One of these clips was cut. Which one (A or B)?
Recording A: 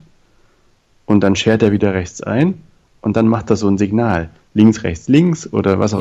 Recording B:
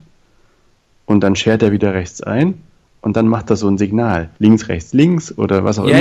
B